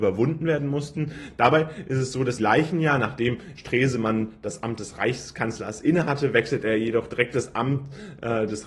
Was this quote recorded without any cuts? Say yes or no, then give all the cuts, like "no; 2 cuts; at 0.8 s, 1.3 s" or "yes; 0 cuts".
no; 2 cuts; at 2.4 s, 3.5 s